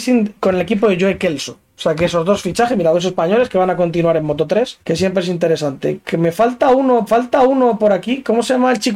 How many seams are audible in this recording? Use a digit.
2